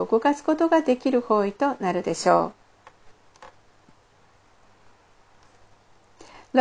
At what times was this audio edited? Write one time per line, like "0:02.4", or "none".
none